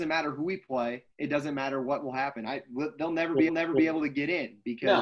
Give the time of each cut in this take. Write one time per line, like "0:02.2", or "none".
0:01.1
0:03.5